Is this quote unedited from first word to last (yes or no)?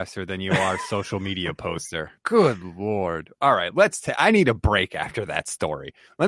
no